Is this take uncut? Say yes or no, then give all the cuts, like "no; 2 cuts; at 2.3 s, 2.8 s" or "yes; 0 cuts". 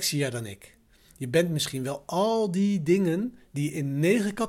yes; 0 cuts